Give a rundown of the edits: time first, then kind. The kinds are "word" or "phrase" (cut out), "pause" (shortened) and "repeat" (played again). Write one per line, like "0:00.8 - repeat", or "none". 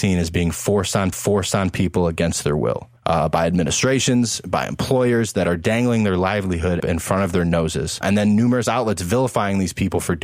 0:01.1 - repeat
0:03.0 - pause
0:06.8 - phrase
0:08.0 - word